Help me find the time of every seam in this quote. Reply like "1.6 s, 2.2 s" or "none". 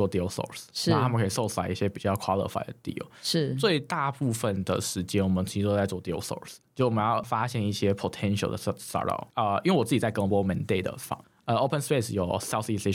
9.3 s, 11.2 s